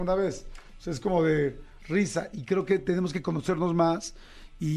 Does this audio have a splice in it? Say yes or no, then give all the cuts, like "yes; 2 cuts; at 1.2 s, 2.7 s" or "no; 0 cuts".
no; 0 cuts